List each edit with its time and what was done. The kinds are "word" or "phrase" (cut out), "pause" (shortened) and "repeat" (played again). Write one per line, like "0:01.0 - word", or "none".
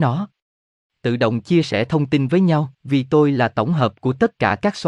0:02.7 - pause